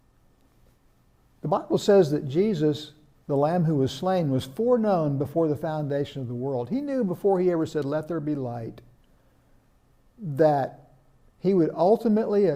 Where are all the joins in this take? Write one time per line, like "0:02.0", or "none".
none